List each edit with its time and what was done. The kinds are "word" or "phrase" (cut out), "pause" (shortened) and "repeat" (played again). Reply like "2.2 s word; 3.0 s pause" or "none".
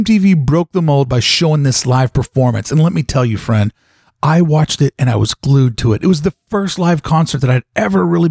none